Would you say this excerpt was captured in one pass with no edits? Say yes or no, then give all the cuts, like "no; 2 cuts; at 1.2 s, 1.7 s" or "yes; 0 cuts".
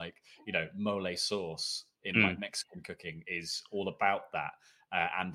yes; 0 cuts